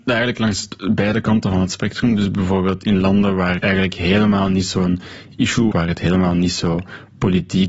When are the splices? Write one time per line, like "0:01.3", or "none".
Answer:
0:03.6
0:05.7